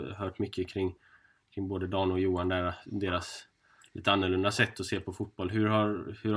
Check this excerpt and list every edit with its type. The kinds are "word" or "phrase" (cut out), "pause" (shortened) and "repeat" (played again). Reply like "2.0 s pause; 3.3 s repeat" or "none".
none